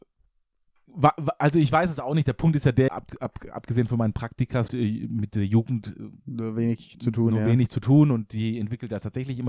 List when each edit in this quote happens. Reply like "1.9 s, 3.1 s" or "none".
2.9 s, 4.7 s